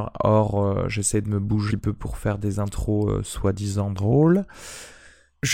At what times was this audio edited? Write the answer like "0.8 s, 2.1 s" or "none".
1.7 s

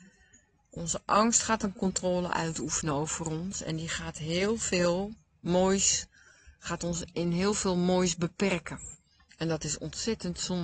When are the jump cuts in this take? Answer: none

